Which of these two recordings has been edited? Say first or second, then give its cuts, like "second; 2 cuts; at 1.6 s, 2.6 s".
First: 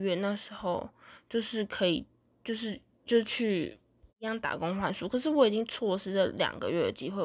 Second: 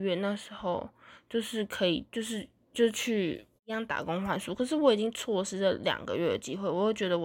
second; 2 cuts; at 2.1 s, 3.6 s